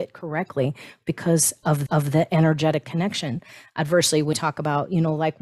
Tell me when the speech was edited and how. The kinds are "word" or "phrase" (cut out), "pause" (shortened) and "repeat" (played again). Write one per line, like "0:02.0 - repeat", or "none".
0:01.9 - repeat
0:02.8 - phrase
0:04.3 - word